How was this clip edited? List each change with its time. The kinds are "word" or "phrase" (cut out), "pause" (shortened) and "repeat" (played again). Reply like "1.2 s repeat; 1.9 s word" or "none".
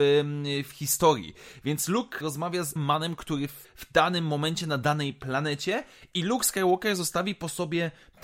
2.2 s word; 2.8 s word; 3.6 s word